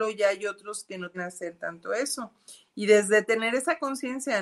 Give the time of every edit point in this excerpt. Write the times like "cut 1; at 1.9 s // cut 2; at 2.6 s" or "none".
cut 1; at 1.1 s